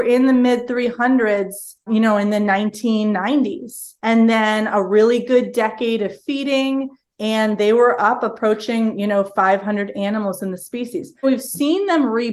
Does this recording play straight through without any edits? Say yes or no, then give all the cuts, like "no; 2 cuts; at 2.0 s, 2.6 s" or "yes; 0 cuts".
no; 3 cuts; at 1.9 s, 4.0 s, 11.2 s